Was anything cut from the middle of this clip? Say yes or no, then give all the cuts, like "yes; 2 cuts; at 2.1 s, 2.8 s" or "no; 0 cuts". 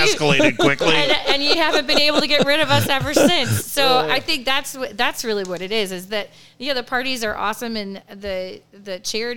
no; 0 cuts